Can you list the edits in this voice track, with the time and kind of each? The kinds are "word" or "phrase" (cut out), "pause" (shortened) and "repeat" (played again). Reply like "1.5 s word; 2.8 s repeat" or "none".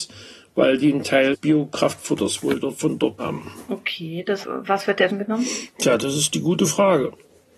1.3 s word; 3.2 s word; 4.4 s word; 5.1 s word

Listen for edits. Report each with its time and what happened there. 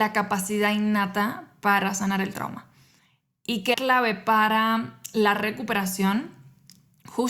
3.7 s word

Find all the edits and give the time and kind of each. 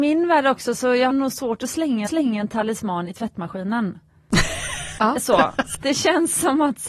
1.1 s word; 2.1 s repeat; 5.7 s word

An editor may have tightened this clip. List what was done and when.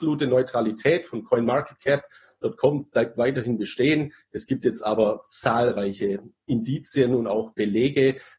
none

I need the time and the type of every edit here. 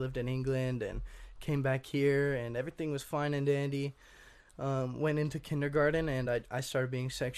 none

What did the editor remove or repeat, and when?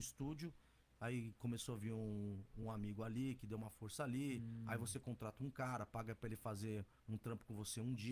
none

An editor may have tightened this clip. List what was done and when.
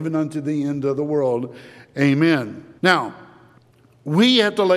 2.8 s pause

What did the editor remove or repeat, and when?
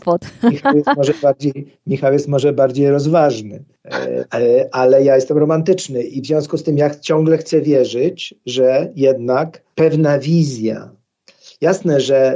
none

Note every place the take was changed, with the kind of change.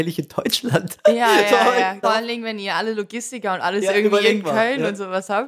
2.0 s phrase

